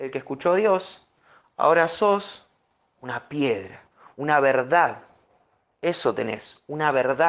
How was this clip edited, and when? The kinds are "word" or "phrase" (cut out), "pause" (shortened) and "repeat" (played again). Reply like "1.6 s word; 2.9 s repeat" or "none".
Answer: none